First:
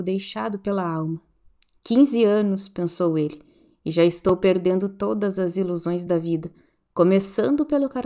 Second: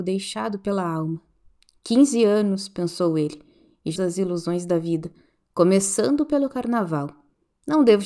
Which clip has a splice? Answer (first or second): second